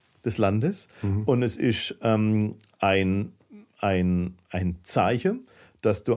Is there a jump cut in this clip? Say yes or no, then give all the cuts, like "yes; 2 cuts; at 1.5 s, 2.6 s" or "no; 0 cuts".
no; 0 cuts